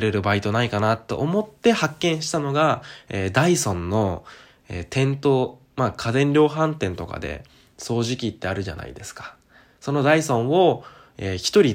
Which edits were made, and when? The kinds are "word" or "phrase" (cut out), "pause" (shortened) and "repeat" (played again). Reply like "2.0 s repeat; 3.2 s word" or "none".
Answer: none